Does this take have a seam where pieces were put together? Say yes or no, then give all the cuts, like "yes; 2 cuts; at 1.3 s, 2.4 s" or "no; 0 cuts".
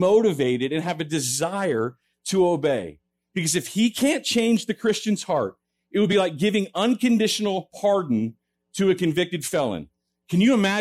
no; 0 cuts